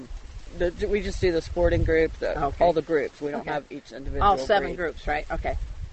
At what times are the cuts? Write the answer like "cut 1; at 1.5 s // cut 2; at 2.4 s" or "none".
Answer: none